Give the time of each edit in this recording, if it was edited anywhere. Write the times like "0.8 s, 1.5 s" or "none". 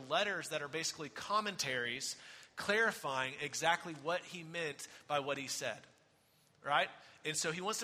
none